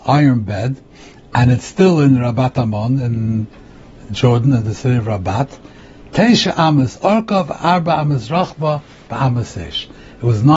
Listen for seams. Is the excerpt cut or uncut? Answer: uncut